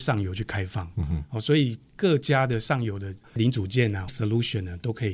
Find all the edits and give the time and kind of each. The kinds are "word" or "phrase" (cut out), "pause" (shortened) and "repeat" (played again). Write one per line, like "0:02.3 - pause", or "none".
0:04.1 - phrase

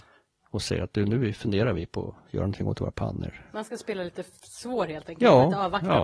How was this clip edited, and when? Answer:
none

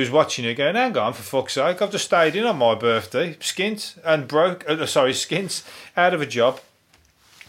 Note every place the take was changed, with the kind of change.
none

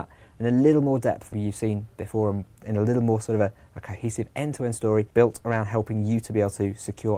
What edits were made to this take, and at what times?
0:01.3 - word
0:05.1 - pause

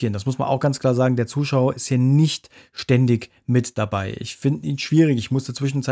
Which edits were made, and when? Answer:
none

